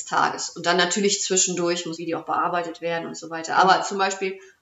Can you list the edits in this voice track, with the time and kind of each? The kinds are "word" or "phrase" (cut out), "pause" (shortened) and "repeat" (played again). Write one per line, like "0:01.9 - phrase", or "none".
0:02.0 - word